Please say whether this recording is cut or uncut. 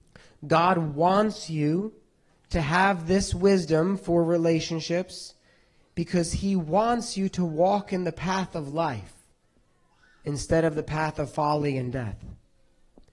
uncut